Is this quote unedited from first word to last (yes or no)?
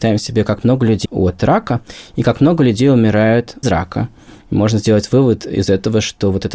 no